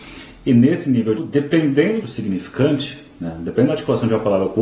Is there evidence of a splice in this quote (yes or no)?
yes